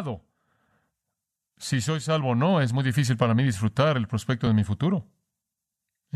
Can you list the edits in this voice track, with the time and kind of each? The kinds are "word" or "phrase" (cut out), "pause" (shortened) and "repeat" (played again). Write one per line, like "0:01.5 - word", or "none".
none